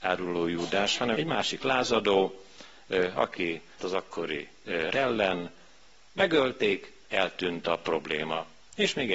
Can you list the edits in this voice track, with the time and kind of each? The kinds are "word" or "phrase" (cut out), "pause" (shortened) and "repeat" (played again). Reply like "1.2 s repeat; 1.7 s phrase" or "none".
1.1 s word; 3.8 s word; 4.9 s word